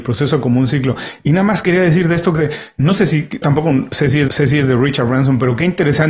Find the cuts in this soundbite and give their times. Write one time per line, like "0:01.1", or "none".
0:02.4
0:03.4
0:04.3